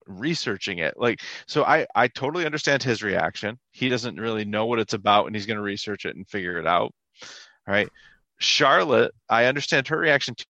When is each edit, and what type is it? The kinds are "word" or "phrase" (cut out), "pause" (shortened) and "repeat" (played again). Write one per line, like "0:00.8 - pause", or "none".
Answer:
0:08.2 - pause